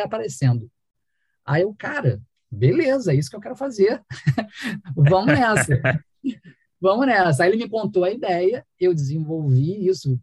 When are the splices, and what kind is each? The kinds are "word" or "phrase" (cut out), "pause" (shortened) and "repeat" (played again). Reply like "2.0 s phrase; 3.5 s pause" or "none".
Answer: none